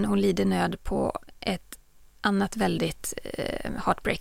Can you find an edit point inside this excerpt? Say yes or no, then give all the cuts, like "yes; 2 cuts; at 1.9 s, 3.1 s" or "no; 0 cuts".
no; 0 cuts